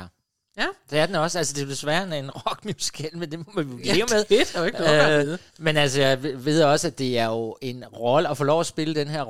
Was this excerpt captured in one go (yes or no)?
no